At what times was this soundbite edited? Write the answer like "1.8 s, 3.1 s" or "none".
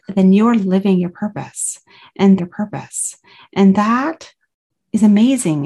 2.4 s